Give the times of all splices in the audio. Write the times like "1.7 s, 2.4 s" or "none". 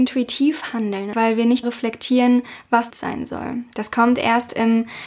1.1 s, 1.6 s, 2.9 s